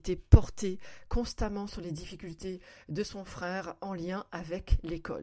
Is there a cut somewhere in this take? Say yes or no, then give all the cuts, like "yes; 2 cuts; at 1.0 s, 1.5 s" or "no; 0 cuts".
no; 0 cuts